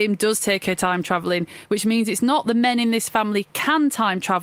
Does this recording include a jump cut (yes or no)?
no